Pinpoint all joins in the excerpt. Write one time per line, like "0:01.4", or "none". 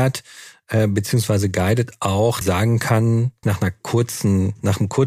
0:02.4
0:03.4